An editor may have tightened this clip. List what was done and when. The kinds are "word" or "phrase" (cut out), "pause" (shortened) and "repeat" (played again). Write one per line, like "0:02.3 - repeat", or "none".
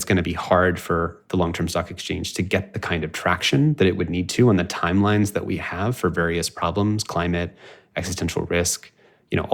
none